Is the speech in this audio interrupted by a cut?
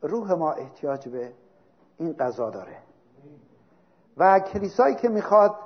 no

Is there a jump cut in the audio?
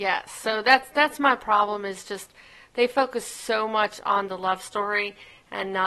no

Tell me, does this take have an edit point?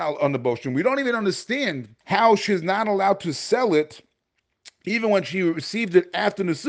yes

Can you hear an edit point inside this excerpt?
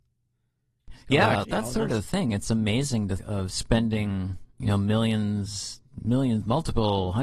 yes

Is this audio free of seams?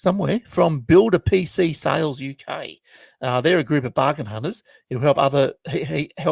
yes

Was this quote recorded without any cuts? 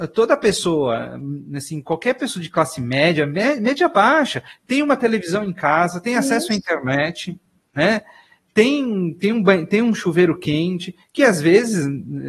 yes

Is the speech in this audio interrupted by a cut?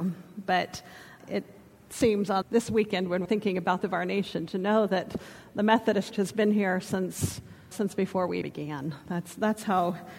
yes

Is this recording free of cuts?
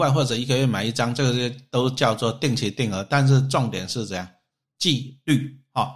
yes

